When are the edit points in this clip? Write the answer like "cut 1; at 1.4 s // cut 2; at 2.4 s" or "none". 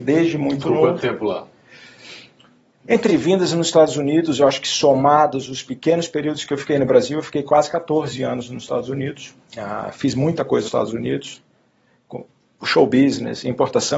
cut 1; at 3.1 s // cut 2; at 9.4 s // cut 3; at 10.6 s

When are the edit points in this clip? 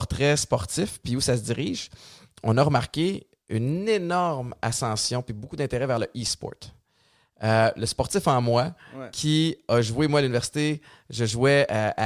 none

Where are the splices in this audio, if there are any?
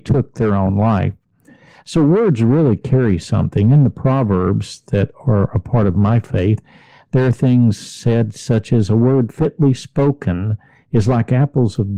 none

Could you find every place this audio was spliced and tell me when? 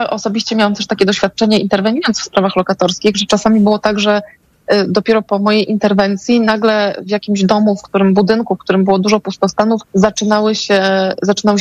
cut 1; at 9.9 s

